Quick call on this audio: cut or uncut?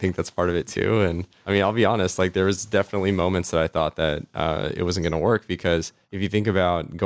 uncut